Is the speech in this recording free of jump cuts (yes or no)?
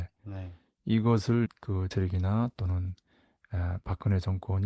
no